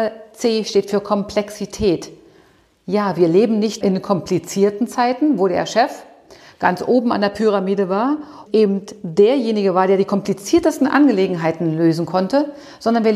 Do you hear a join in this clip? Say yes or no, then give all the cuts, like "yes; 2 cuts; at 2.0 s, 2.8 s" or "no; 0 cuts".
yes; 2 cuts; at 3.8 s, 8.5 s